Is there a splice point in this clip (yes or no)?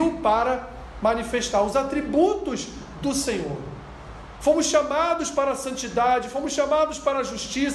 no